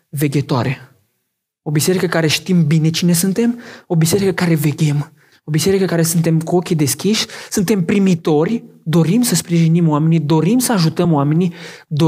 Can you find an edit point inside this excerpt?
no; 0 cuts

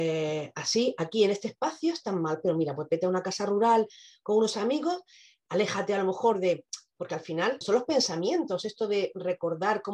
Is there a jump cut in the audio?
yes; 1 cut; at 7.6 s

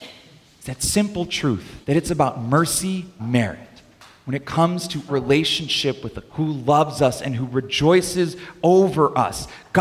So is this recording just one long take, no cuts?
no; 4 cuts; at 1.8 s, 3.2 s, 5.1 s, 6.3 s

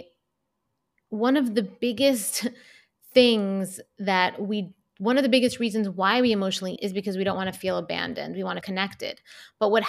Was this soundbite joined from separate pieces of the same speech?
yes; 2 cuts; at 6.8 s, 8.6 s

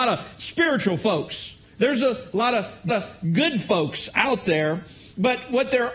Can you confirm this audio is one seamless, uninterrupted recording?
no; 1 cut; at 2.9 s

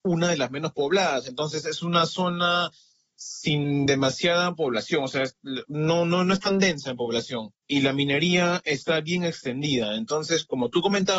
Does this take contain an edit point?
no; 0 cuts

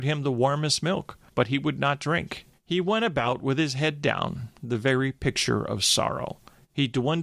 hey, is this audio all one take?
yes; 0 cuts

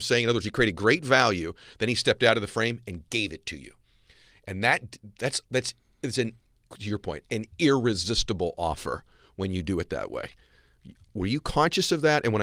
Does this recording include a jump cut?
yes; 1 cut; at 6.7 s

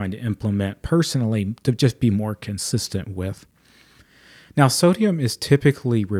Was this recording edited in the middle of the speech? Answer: no; 0 cuts

